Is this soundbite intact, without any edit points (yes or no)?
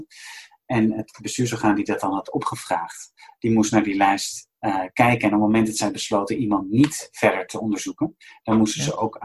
yes